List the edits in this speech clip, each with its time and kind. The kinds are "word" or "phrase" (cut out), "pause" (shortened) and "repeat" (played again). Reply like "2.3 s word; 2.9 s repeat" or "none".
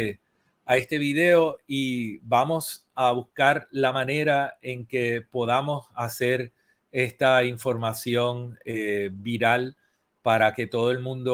none